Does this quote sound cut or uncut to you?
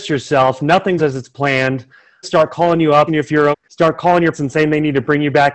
cut